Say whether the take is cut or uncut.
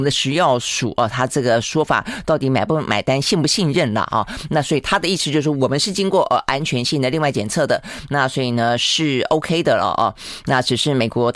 uncut